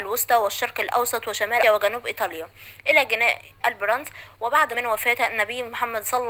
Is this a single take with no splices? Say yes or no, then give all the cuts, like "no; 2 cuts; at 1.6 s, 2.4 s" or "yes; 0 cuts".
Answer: no; 3 cuts; at 1.6 s, 3.6 s, 4.7 s